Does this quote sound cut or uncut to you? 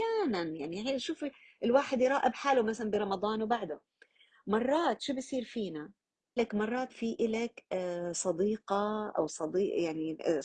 cut